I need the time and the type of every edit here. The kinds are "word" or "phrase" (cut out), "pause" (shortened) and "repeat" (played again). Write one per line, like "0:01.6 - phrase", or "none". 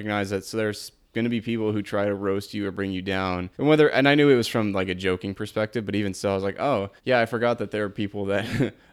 0:03.5 - pause
0:07.0 - pause